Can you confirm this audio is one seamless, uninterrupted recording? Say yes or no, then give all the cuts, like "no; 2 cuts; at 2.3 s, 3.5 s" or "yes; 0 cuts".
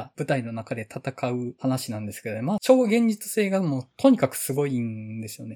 yes; 0 cuts